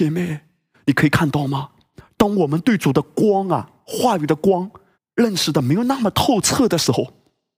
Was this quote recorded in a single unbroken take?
no; 1 cut; at 4.9 s

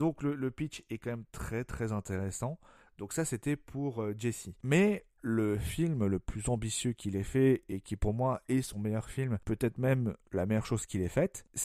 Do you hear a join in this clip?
no; 0 cuts

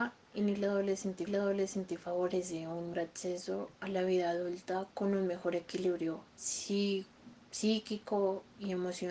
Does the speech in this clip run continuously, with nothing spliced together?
no; 4 cuts; at 1.3 s, 2.9 s, 3.7 s, 6.3 s

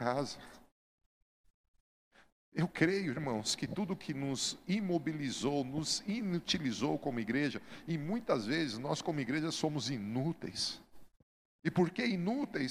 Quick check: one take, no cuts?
yes; 0 cuts

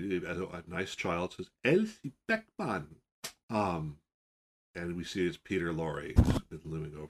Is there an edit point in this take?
no; 0 cuts

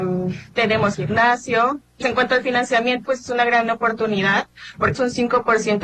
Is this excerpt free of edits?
no; 4 cuts; at 0.9 s, 2.0 s, 3.1 s, 5.0 s

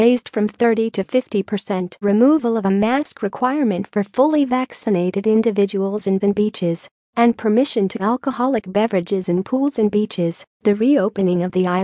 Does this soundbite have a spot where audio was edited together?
yes; 4 cuts; at 2.0 s, 6.2 s, 8.0 s, 10.5 s

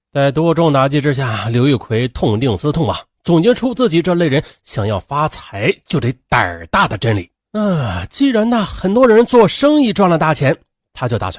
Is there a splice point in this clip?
yes; 1 cut; at 7.4 s

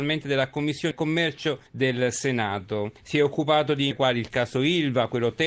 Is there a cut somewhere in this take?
yes; 4 cuts; at 0.9 s, 1.7 s, 3.0 s, 3.9 s

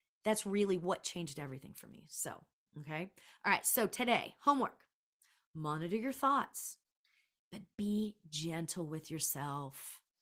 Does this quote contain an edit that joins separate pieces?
no; 0 cuts

